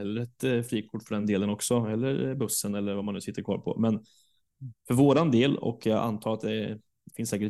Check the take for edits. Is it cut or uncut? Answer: uncut